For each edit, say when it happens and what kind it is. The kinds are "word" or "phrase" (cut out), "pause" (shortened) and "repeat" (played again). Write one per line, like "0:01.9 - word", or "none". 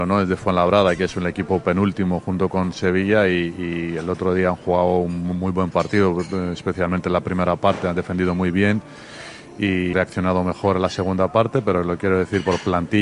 0:09.9 - word